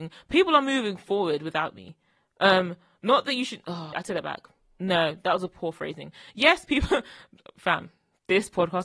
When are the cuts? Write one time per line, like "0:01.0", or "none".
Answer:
0:03.9

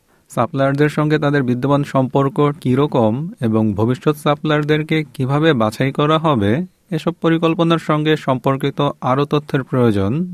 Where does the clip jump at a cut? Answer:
0:02.6

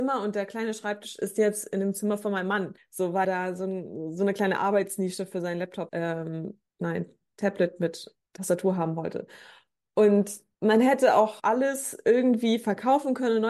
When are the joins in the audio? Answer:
0:02.8
0:03.2
0:05.9
0:06.6
0:08.3
0:10.5
0:11.4

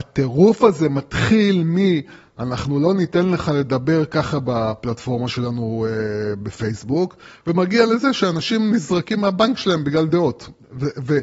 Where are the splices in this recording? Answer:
none

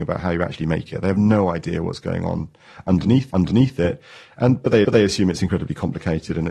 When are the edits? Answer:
0:03.3
0:04.8

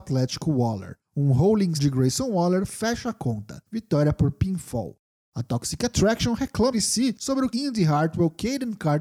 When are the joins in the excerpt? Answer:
0:01.8
0:06.7
0:07.5

